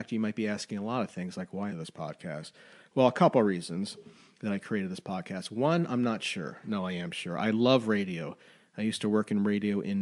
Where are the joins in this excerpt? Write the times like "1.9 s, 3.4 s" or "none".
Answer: 1.7 s